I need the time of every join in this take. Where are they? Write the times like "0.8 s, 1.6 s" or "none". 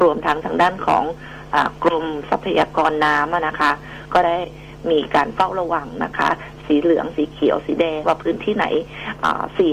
8.0 s